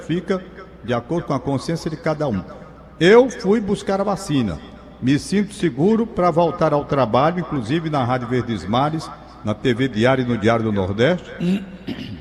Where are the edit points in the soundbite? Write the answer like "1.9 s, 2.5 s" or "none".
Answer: none